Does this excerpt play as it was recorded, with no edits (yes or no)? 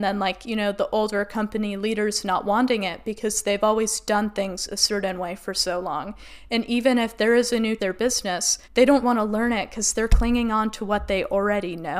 no